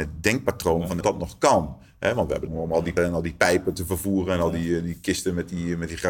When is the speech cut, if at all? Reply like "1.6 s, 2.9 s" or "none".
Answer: 1.0 s, 2.5 s, 3.0 s